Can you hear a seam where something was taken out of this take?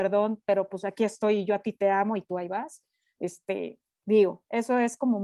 no; 0 cuts

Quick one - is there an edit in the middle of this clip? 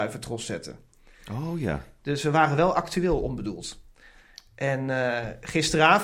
no; 0 cuts

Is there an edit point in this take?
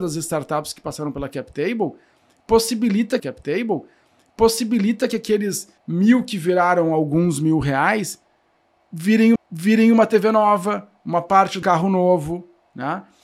yes; 4 cuts; at 3.2 s, 5.8 s, 9.4 s, 11.6 s

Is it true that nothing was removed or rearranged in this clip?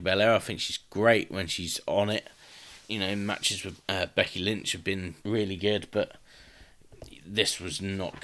no; 3 cuts; at 2.8 s, 3.8 s, 5.2 s

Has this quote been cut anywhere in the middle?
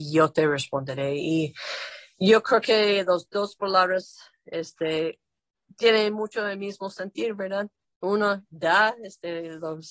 no; 0 cuts

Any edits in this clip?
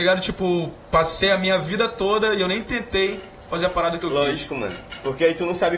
no; 0 cuts

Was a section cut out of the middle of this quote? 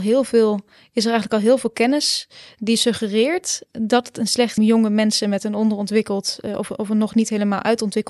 yes; 2 cuts; at 3.7 s, 4.6 s

